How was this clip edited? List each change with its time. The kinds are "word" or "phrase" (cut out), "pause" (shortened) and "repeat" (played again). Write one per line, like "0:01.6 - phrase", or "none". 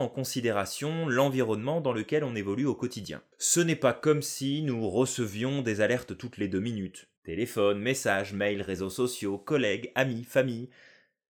0:03.3 - pause
0:07.2 - pause